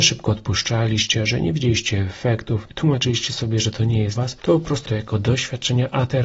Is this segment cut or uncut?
cut